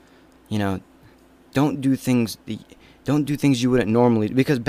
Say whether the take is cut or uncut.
cut